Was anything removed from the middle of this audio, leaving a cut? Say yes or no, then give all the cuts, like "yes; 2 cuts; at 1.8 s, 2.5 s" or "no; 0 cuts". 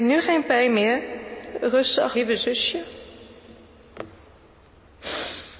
yes; 1 cut; at 2.1 s